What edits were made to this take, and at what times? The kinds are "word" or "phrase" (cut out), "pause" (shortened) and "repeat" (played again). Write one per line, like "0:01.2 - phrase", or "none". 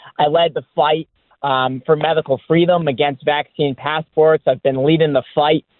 none

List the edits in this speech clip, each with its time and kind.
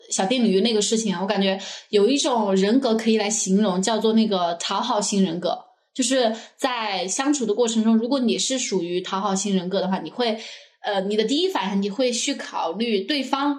none

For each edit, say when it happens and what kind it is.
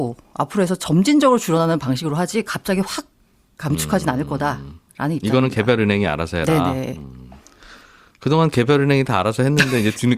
none

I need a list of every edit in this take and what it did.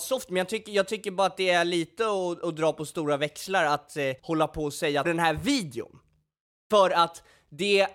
0:04.2 - pause
0:05.0 - phrase

